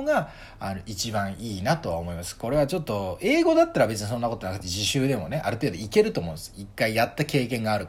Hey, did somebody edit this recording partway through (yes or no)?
no